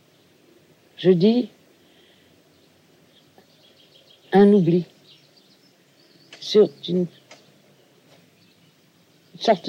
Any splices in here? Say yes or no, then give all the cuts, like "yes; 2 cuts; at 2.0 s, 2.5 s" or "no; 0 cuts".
no; 0 cuts